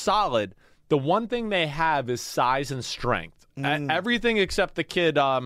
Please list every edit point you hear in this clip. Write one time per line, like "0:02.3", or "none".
0:03.5